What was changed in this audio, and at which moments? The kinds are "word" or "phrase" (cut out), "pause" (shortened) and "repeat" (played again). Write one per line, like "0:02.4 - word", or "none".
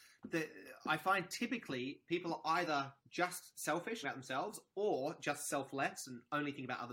0:03.0 - pause
0:04.0 - phrase